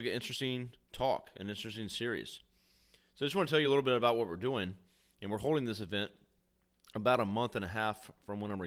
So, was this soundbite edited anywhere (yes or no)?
no